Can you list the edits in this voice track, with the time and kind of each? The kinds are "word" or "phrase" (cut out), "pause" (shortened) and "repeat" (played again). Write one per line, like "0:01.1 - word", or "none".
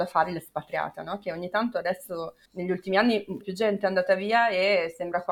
0:02.5 - pause
0:03.4 - word

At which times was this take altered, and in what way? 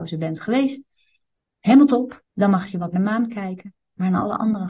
0:02.3 - pause
0:02.9 - phrase

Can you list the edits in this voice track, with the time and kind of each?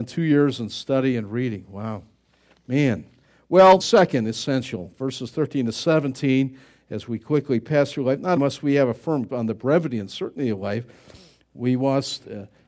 0:03.8 - word
0:08.4 - word
0:09.3 - word

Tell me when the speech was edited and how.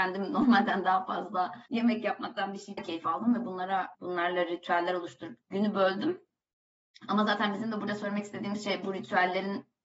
0:01.7 - pause
0:02.8 - phrase
0:03.9 - word
0:05.4 - word

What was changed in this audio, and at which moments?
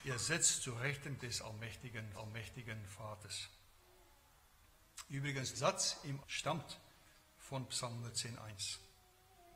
0:01.2 - word
0:02.1 - repeat
0:05.5 - word
0:06.2 - word

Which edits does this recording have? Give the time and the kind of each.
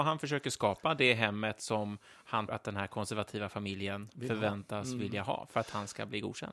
0:02.5 - word

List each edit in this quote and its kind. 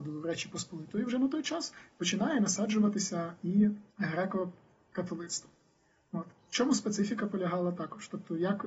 0:03.9 - pause

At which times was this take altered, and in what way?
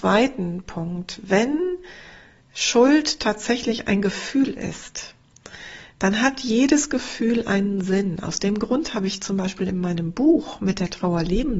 none

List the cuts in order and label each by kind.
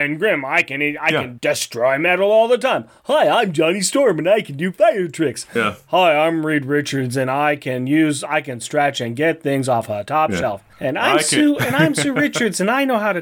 0:01.4 - word

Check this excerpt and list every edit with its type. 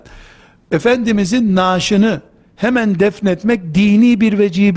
none

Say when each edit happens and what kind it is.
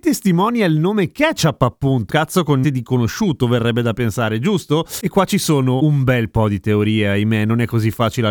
0:02.1 - phrase
0:02.6 - word

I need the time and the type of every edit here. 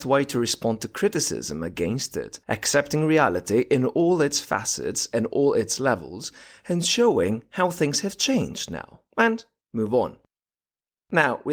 0:02.4 - pause
0:09.1 - pause

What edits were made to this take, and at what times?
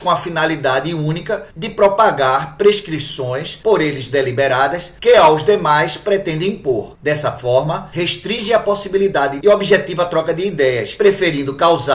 0:09.4 - phrase

